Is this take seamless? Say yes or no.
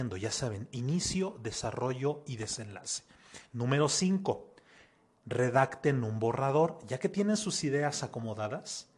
yes